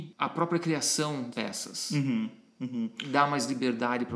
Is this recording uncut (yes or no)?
no